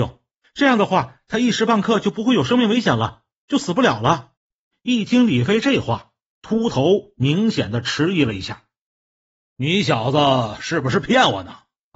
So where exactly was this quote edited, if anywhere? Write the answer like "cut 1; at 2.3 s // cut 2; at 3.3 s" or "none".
cut 1; at 4.4 s